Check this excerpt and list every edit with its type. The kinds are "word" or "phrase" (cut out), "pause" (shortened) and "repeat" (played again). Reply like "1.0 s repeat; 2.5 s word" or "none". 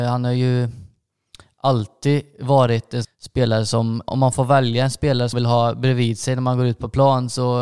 3.0 s phrase; 4.1 s word; 5.3 s word